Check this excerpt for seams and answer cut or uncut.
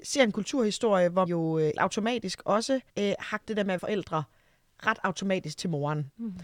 cut